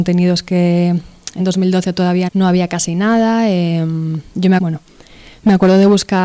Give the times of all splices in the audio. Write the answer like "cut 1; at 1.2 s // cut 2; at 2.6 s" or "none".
cut 1; at 1.4 s // cut 2; at 2.3 s // cut 3; at 4.6 s